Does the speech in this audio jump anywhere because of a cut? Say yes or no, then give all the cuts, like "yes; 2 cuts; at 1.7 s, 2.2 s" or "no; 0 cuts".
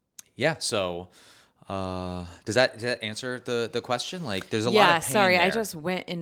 no; 0 cuts